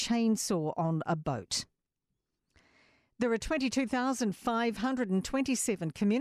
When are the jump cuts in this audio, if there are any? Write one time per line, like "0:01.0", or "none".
none